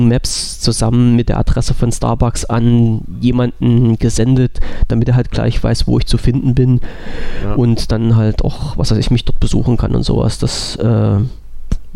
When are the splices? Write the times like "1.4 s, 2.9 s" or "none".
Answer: none